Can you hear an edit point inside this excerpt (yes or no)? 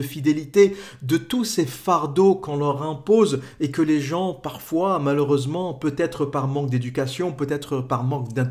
no